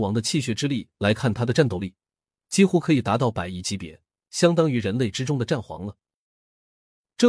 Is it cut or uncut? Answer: uncut